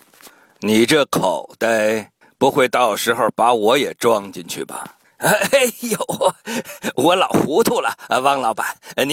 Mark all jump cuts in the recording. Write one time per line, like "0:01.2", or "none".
0:02.2
0:05.0